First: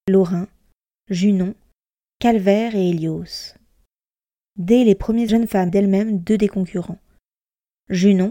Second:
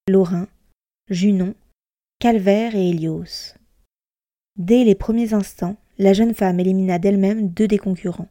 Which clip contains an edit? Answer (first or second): first